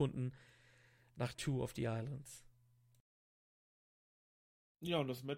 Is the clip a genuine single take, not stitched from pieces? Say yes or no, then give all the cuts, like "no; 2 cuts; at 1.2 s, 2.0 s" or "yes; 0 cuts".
no; 1 cut; at 1.3 s